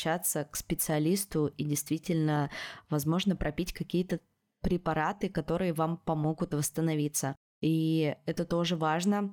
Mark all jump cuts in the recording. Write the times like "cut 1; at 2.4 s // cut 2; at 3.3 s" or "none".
cut 1; at 7.4 s